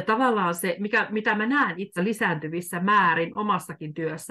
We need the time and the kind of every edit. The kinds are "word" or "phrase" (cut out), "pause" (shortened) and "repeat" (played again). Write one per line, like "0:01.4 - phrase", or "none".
0:02.0 - word